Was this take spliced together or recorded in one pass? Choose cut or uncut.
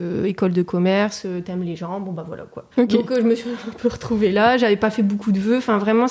cut